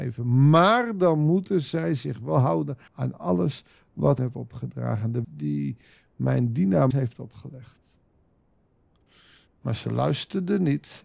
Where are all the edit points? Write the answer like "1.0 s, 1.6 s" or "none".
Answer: 2.9 s, 4.2 s, 5.2 s, 6.9 s